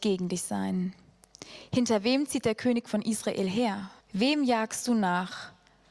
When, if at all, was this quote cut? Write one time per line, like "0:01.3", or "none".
0:04.0